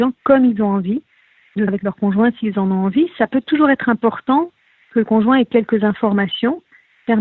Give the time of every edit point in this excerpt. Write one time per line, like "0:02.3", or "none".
0:01.7